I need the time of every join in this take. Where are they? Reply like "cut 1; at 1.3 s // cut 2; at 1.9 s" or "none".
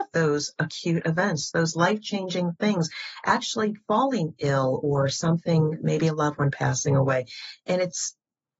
none